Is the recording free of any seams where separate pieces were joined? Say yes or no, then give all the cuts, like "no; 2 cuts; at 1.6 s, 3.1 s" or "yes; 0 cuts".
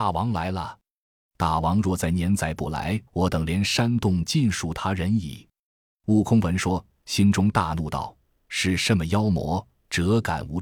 no; 1 cut; at 3.1 s